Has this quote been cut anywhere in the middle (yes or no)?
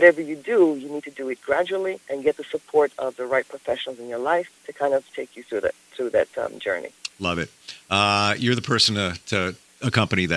yes